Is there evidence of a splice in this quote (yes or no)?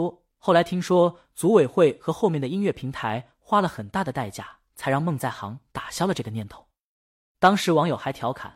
no